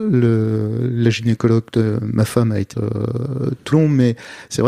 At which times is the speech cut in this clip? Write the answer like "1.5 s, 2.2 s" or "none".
2.7 s, 3.7 s